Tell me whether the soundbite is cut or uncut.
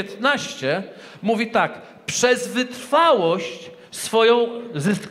uncut